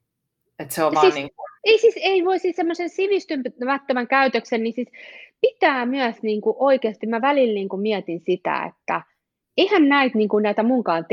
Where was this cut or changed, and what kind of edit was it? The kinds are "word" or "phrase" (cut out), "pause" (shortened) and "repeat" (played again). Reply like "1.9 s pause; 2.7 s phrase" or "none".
1.6 s pause